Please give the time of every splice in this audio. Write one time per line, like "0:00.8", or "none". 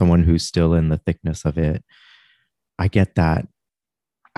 none